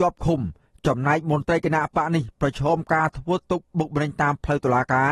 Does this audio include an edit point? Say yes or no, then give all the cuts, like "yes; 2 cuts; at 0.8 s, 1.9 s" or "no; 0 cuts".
no; 0 cuts